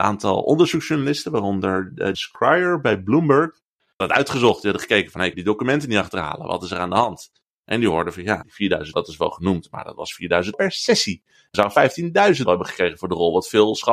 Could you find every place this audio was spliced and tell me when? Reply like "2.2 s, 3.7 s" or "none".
2.1 s, 4.0 s, 5.3 s, 8.4 s, 8.9 s, 10.5 s, 11.5 s, 12.5 s